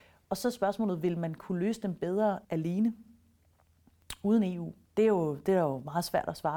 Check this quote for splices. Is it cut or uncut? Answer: cut